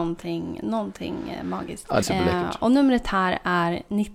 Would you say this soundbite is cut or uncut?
cut